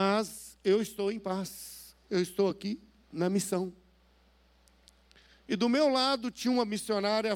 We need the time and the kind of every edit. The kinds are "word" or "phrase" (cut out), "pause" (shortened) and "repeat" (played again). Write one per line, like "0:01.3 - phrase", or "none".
none